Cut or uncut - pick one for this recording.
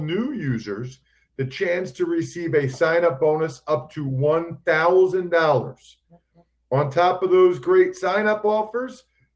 uncut